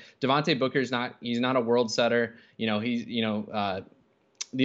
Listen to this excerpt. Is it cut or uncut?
uncut